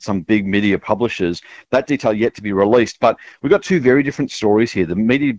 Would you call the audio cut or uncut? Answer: uncut